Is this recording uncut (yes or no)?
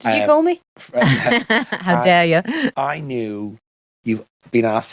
yes